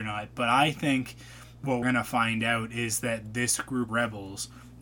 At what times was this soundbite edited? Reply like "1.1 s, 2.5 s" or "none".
1.8 s, 3.9 s